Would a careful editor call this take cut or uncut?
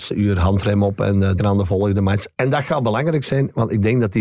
cut